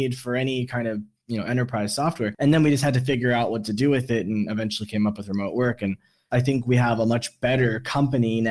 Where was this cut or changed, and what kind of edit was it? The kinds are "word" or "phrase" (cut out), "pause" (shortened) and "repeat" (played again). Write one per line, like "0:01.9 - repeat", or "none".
none